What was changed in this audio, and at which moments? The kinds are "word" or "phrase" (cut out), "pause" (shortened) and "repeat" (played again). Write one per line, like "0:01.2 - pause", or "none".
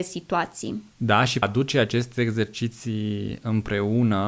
0:00.9 - pause
0:01.4 - phrase